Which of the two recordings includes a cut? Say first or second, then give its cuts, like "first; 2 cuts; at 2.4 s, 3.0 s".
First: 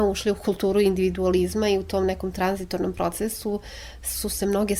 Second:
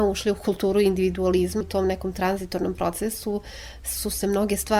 second; 1 cut; at 1.6 s